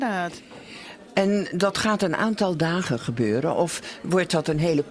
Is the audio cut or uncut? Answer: uncut